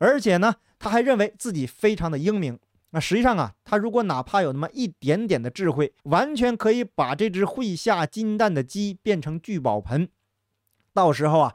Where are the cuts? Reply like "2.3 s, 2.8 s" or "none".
6.0 s